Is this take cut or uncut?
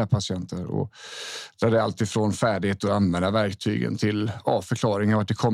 uncut